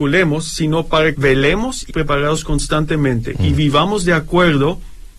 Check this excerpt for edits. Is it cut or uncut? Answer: cut